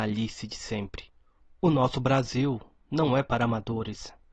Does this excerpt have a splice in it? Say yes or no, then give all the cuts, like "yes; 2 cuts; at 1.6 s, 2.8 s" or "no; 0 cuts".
no; 0 cuts